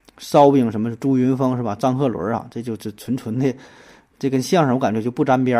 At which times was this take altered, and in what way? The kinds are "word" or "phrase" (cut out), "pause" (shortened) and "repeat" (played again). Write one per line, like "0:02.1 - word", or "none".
none

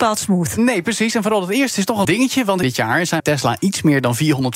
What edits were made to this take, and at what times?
0:02.0 - word
0:02.6 - phrase
0:03.2 - word

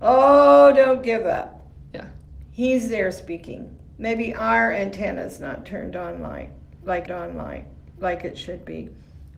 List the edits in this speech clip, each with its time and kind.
0:05.6 - phrase
0:07.1 - repeat

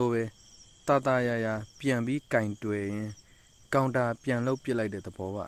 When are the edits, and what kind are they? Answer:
none

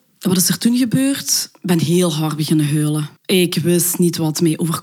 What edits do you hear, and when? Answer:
0:03.2 - pause

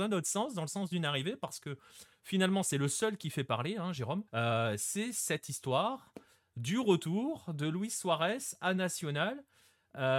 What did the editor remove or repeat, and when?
0:04.3 - pause

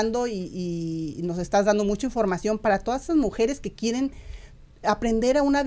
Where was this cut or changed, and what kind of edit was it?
none

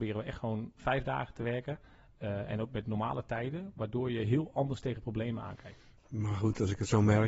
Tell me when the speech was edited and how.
0:06.0 - pause

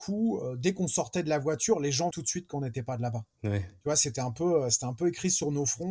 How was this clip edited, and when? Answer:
0:02.1 - word
0:03.3 - pause

